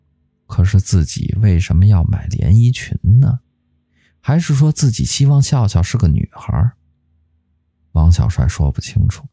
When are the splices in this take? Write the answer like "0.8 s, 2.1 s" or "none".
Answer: none